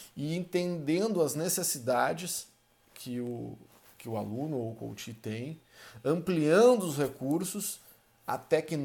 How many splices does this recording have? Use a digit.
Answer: 0